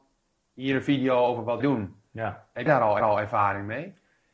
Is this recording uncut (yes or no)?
no